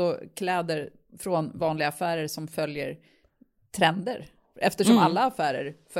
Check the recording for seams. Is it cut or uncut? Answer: uncut